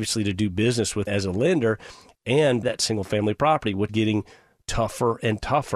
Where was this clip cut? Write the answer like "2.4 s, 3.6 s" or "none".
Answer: 1.1 s, 2.6 s, 3.9 s

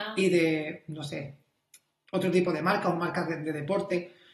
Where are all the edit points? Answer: none

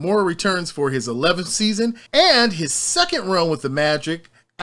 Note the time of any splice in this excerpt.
2.1 s

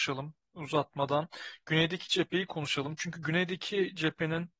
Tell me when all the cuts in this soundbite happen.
none

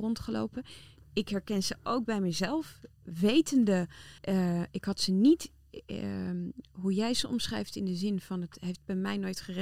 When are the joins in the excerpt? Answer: 4.2 s

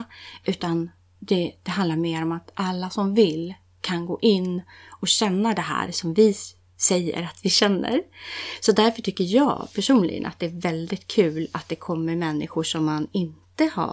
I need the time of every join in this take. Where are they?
none

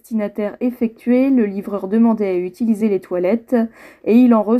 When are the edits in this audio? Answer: none

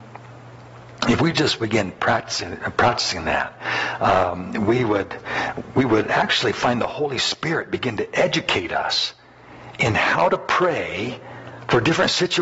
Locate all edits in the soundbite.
none

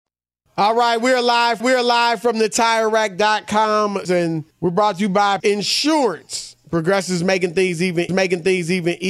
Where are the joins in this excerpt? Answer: 1.6 s, 4.1 s, 4.5 s, 5.4 s, 8.1 s

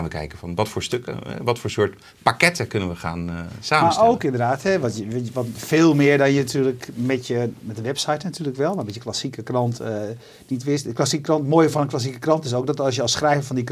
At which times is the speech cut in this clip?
none

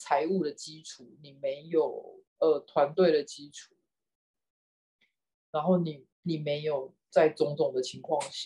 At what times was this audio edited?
2.3 s, 6.1 s

